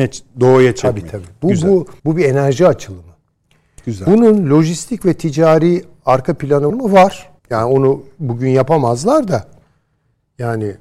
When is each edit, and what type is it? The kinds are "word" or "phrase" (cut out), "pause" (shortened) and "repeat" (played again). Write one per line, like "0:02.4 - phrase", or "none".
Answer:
0:02.0 - pause
0:06.7 - word
0:07.4 - pause